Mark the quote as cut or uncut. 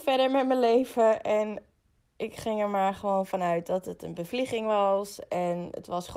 uncut